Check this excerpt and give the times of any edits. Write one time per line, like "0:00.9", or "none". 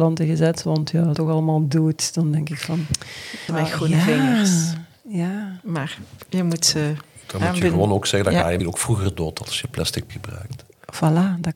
0:01.1
0:03.5
0:08.6
0:10.1